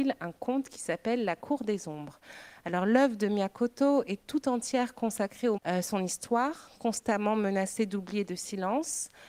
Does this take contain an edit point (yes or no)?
yes